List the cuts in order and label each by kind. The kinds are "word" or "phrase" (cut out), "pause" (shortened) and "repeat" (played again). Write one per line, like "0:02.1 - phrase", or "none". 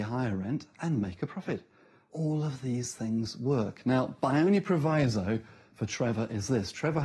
none